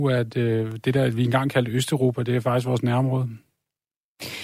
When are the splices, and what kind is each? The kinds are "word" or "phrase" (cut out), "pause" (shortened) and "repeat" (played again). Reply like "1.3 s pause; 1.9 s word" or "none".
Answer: none